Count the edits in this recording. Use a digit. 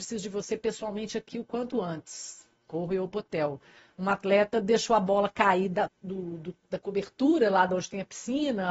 1